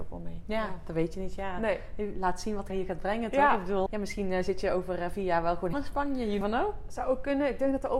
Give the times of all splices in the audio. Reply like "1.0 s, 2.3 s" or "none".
2.7 s, 3.9 s, 5.7 s, 6.4 s